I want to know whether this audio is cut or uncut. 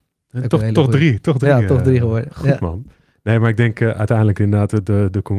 uncut